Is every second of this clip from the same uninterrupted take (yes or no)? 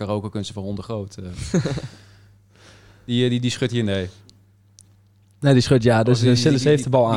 yes